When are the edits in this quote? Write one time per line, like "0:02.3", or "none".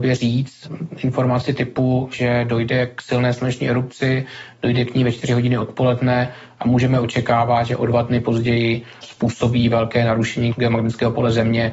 none